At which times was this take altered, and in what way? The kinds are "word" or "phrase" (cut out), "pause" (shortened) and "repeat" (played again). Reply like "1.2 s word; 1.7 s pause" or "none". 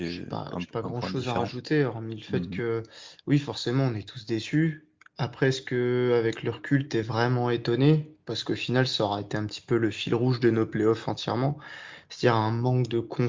none